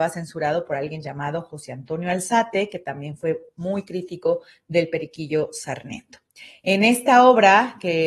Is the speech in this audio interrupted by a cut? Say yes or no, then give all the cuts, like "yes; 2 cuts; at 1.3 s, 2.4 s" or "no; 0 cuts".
no; 0 cuts